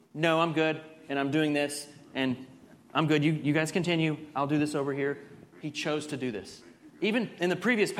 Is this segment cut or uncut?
uncut